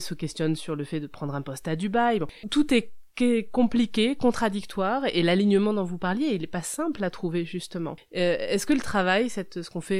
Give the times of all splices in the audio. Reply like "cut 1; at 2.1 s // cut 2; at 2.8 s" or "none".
cut 1; at 2.4 s